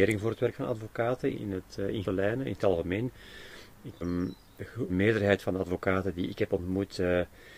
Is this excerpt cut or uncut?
cut